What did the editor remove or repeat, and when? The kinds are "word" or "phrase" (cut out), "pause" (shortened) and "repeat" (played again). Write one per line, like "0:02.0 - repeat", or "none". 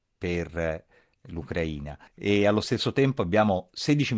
0:02.1 - pause